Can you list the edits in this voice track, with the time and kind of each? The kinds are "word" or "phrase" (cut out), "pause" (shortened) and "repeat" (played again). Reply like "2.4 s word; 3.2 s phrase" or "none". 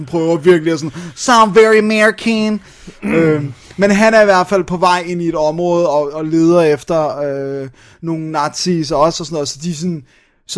none